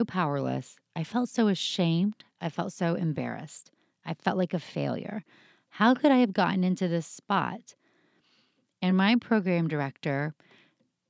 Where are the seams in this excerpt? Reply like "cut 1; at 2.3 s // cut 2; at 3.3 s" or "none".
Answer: none

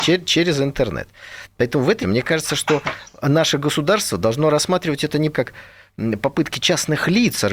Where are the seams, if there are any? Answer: cut 1; at 2.0 s // cut 2; at 5.3 s

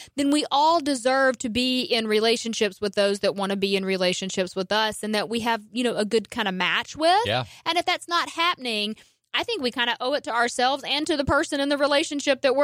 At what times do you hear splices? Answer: none

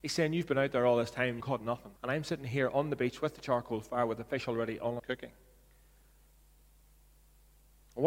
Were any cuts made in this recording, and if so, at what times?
cut 1; at 1.4 s // cut 2; at 2.0 s // cut 3; at 5.0 s

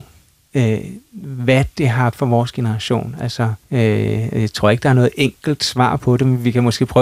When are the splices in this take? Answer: cut 1; at 2.1 s // cut 2; at 3.6 s

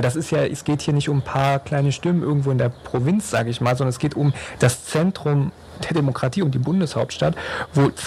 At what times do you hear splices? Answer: none

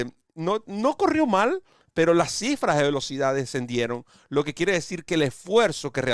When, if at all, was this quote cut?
none

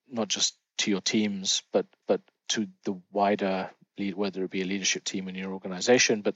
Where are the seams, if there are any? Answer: cut 1; at 2.0 s

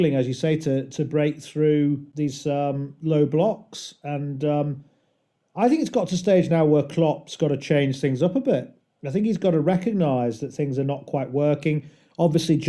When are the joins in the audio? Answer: none

